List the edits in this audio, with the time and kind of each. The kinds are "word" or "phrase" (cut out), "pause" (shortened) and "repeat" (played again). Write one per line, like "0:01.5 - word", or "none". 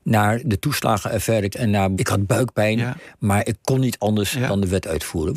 0:01.5 - word
0:02.0 - phrase